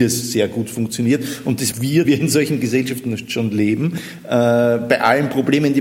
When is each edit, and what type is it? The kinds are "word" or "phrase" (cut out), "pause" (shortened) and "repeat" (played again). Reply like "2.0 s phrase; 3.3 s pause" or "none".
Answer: 1.7 s phrase; 2.0 s word